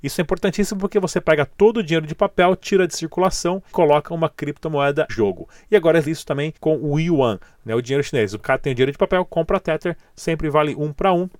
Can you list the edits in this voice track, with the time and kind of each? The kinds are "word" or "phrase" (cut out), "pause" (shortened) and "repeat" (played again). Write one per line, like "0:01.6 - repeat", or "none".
0:03.7 - word
0:05.1 - word
0:06.1 - phrase
0:06.6 - pause
0:08.4 - word